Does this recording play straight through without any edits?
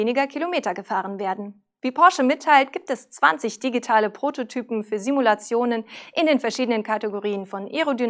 yes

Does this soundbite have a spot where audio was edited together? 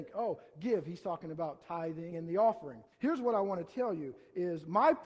yes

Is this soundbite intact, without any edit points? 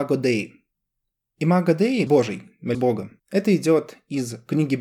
no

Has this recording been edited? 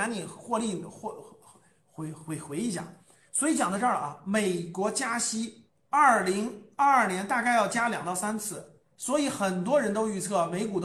no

